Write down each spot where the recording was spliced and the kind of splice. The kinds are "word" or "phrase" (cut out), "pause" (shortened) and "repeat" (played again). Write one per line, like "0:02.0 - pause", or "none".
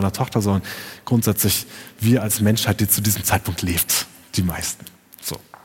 none